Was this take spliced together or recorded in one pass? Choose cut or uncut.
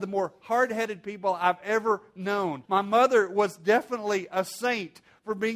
cut